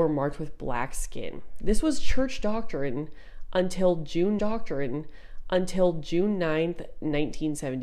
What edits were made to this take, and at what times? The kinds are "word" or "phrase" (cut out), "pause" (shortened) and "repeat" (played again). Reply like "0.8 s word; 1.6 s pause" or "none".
4.4 s repeat